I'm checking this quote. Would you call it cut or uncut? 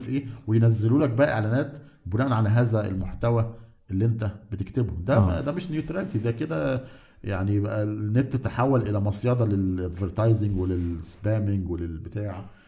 uncut